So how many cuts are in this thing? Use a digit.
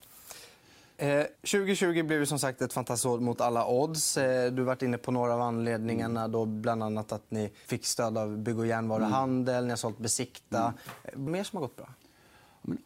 3